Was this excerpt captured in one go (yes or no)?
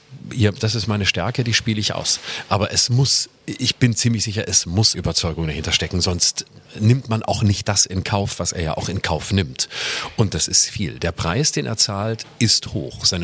no